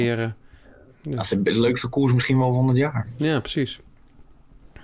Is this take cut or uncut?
uncut